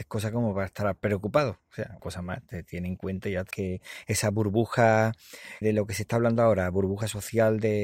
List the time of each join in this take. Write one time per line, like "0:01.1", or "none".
0:02.0
0:03.5
0:05.6